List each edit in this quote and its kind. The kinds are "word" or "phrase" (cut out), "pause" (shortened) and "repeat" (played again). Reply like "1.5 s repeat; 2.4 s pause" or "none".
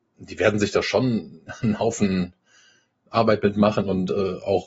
none